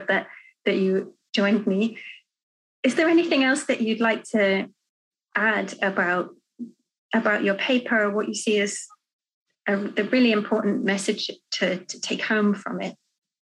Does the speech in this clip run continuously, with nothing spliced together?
yes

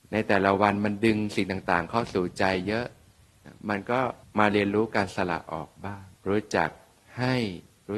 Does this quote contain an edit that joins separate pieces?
yes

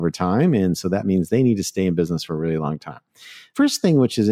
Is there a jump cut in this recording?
no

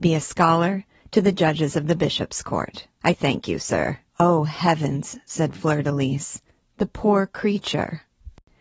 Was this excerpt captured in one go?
no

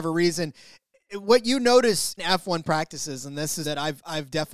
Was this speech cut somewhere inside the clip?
yes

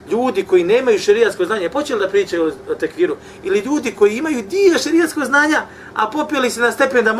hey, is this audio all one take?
yes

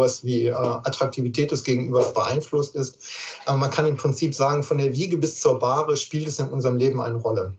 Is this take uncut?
yes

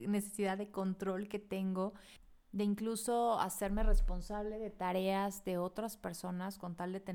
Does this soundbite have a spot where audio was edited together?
no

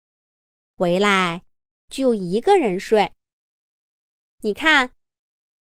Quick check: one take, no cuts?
yes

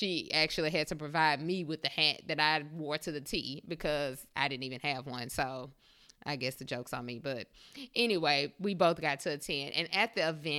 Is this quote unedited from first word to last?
yes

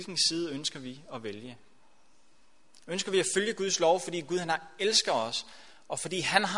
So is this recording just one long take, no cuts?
yes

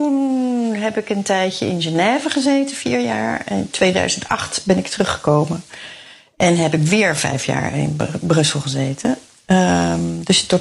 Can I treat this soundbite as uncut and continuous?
yes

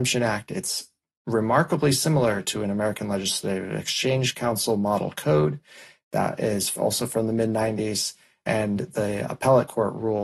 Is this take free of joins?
yes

